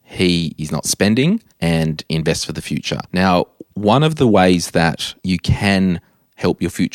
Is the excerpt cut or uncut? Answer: cut